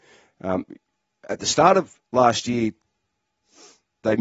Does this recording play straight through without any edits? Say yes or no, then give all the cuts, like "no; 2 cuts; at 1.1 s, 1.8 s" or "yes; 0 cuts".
no; 1 cut; at 2.0 s